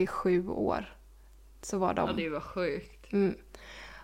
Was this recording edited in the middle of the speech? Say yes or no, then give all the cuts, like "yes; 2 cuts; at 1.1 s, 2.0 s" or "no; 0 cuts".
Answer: no; 0 cuts